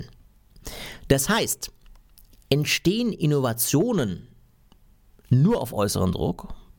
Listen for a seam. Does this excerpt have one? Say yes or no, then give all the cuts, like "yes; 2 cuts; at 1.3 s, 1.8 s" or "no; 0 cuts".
no; 0 cuts